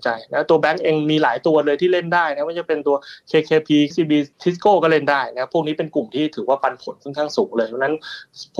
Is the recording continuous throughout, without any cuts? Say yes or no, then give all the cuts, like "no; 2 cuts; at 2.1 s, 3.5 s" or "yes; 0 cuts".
no; 2 cuts; at 3.9 s, 4.3 s